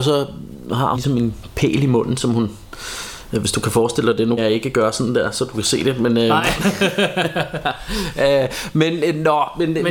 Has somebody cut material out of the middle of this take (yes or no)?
yes